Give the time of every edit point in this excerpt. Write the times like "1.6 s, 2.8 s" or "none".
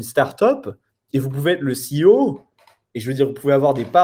none